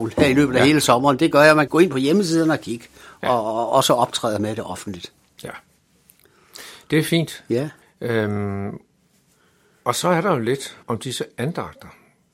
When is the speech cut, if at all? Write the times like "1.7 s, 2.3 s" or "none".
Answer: 1.7 s, 7.8 s, 10.8 s

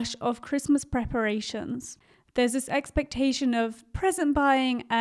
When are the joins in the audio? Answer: none

